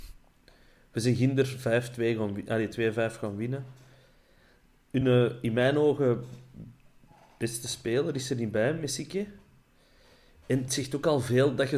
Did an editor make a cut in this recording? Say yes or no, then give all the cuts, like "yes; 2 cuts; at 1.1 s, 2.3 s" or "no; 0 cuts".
no; 0 cuts